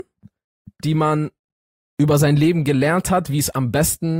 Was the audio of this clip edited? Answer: no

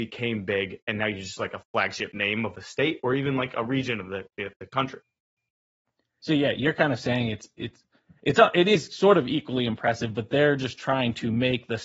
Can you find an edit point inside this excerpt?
no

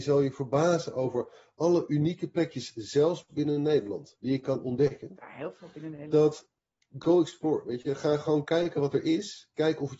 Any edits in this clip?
no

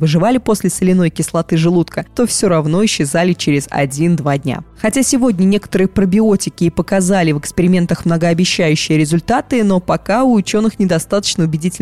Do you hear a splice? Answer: no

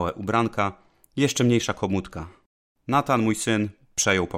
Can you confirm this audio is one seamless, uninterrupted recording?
yes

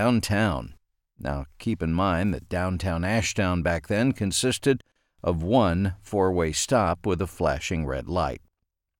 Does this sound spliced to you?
no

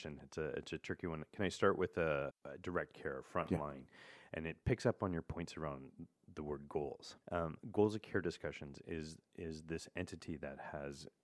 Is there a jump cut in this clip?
yes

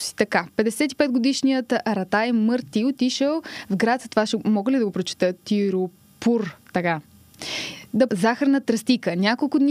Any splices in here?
yes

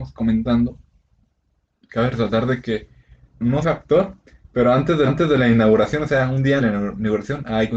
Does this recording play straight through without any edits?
no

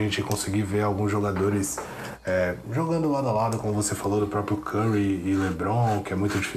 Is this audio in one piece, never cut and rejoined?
yes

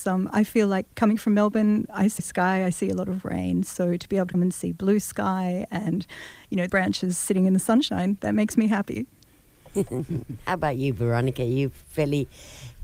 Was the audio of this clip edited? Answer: yes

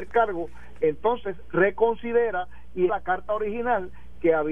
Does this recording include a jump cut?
yes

